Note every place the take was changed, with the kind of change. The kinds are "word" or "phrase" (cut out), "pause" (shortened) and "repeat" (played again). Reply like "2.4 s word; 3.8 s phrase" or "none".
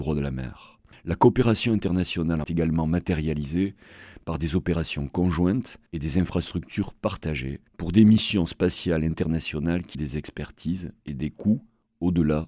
0.9 s pause; 2.4 s phrase; 5.9 s pause; 7.7 s pause; 9.9 s word